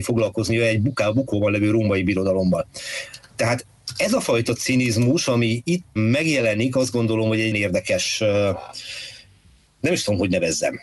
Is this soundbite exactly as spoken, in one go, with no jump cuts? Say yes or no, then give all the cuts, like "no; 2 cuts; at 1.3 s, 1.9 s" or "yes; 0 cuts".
no; 2 cuts; at 6.0 s, 7.5 s